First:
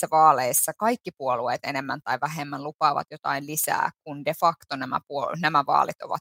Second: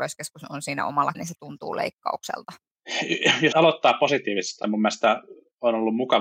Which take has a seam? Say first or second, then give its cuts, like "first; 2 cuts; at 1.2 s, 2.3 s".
second; 3 cuts; at 1.1 s, 3.5 s, 4.6 s